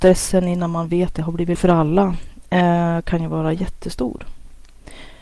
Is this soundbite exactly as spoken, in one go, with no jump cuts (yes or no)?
no